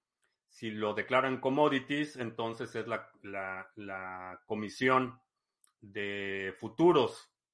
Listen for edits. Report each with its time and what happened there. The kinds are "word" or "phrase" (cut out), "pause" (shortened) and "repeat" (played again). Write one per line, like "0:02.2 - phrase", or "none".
none